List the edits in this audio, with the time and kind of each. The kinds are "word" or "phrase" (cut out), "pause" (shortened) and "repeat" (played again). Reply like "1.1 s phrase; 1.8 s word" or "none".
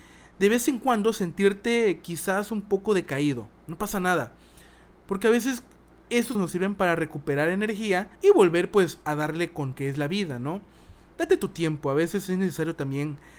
6.4 s word; 8.2 s pause; 9.7 s phrase